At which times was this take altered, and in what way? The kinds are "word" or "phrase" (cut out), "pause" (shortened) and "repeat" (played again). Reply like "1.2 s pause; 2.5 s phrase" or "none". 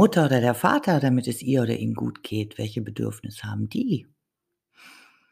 none